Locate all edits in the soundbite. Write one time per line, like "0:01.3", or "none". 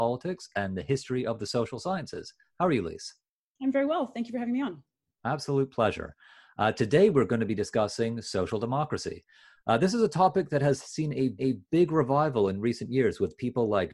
0:11.4